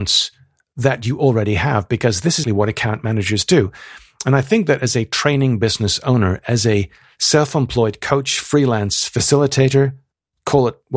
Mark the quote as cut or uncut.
cut